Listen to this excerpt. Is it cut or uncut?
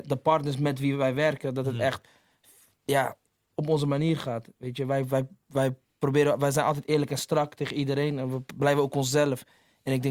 uncut